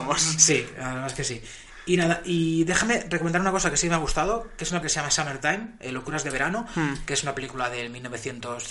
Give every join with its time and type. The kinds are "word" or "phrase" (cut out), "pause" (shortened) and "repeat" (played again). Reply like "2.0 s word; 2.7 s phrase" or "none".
4.8 s word